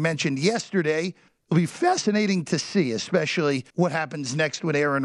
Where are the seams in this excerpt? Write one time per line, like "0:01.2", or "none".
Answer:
0:01.3
0:03.7